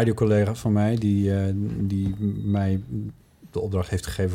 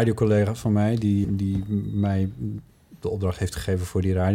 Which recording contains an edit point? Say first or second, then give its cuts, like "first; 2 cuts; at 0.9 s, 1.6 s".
second; 1 cut; at 1.2 s